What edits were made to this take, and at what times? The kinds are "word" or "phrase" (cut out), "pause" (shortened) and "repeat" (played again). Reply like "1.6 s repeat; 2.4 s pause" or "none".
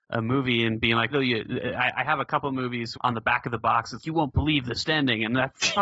1.1 s word; 2.9 s word; 4.0 s word; 4.8 s word